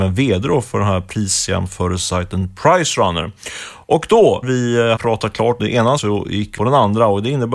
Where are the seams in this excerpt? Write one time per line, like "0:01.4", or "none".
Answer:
0:04.4
0:05.0
0:05.6
0:06.0
0:06.6